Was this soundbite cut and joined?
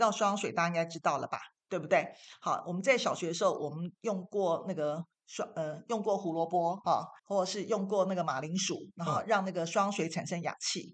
yes; 2 cuts; at 6.8 s, 7.2 s

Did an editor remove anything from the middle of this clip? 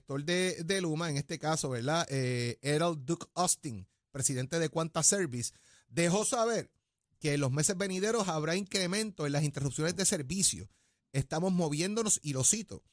no; 0 cuts

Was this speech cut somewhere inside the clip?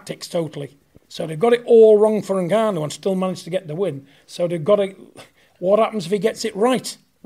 no; 0 cuts

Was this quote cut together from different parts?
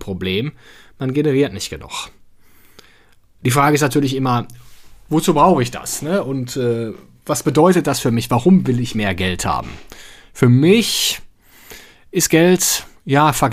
no; 0 cuts

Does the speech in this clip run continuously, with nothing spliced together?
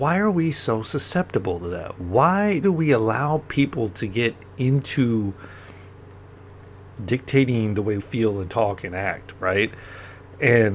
no; 3 cuts; at 2.6 s, 7.0 s, 8.0 s

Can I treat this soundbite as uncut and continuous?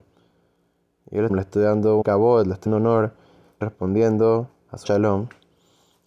no; 5 cuts; at 1.3 s, 2.0 s, 2.7 s, 3.6 s, 4.8 s

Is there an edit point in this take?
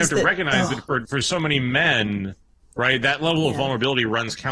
no; 0 cuts

